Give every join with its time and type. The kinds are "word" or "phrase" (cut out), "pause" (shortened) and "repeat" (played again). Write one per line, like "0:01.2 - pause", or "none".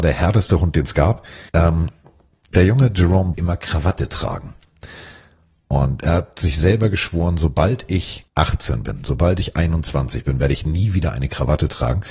0:01.5 - pause
0:03.3 - phrase
0:08.3 - pause